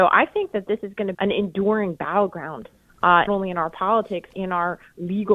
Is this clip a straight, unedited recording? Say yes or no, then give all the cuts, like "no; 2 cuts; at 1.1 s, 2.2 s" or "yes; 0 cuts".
no; 3 cuts; at 1.1 s, 3.3 s, 4.3 s